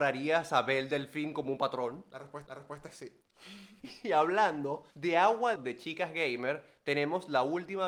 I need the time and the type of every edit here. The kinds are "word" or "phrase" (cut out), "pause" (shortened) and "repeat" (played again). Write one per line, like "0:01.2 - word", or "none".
0:02.5 - repeat
0:04.9 - pause
0:05.6 - phrase